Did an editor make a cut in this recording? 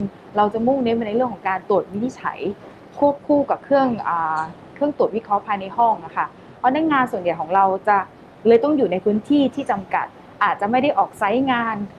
no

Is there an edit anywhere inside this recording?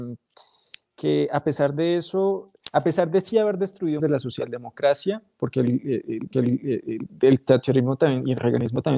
yes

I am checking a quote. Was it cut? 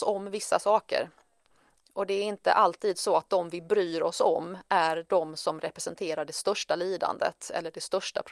no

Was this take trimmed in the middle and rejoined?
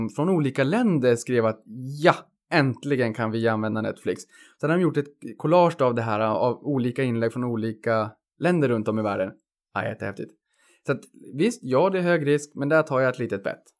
no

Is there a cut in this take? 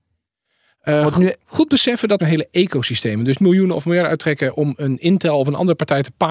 yes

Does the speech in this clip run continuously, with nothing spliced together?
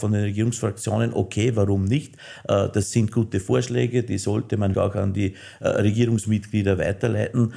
no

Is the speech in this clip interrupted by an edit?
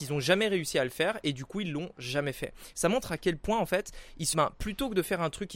yes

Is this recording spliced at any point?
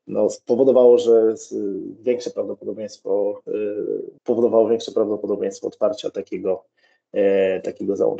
yes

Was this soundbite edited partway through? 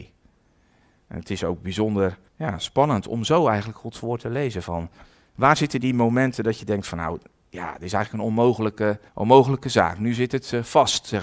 yes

